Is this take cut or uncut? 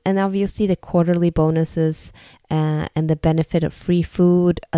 uncut